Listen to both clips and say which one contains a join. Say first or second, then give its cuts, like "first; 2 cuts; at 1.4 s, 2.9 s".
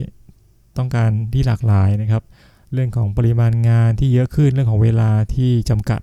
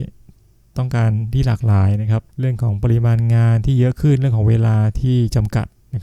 second; 1 cut; at 2.3 s